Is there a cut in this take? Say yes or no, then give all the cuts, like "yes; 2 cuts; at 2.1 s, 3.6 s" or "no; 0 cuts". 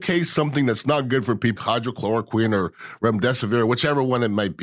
yes; 1 cut; at 1.6 s